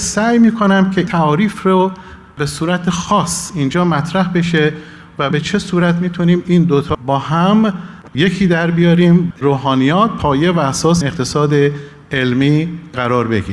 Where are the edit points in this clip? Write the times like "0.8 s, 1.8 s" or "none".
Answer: 1.1 s, 5.3 s, 6.9 s, 8.1 s, 9.3 s, 11.0 s

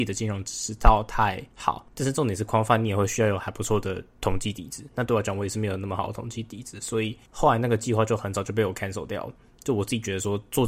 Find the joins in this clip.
7.3 s

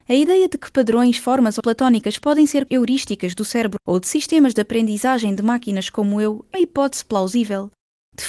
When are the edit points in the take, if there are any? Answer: 1.6 s, 2.7 s, 3.8 s, 6.5 s

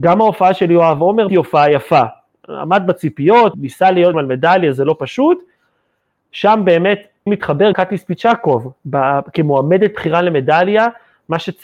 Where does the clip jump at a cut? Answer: 1.3 s, 3.5 s, 4.1 s, 7.3 s, 7.7 s

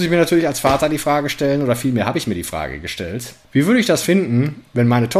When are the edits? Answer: none

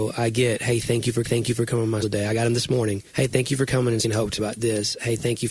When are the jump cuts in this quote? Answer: 1.2 s, 2.0 s, 3.1 s, 4.0 s, 4.4 s

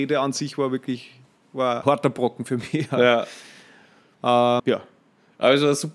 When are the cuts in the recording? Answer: 1.8 s, 4.6 s

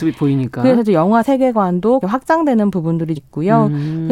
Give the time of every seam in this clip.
1.2 s, 2.0 s, 3.2 s

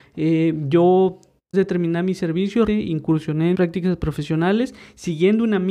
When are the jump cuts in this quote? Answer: 1.5 s, 2.7 s, 3.5 s

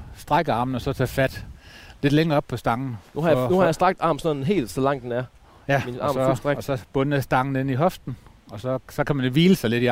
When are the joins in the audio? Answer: none

